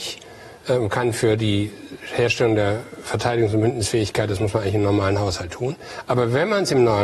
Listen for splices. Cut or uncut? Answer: uncut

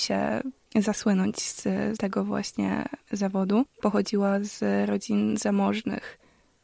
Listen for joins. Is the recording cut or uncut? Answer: cut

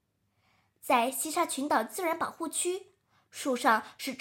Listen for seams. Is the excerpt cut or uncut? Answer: uncut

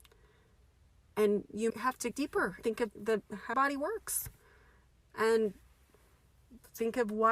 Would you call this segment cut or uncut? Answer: cut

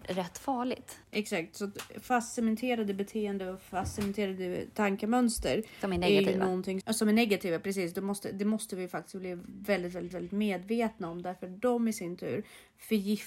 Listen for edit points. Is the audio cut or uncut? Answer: cut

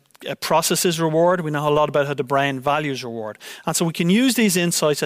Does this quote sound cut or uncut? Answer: uncut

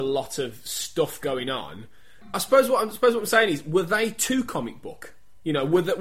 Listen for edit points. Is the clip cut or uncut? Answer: uncut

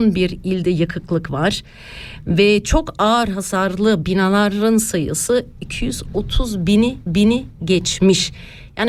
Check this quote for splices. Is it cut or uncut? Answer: cut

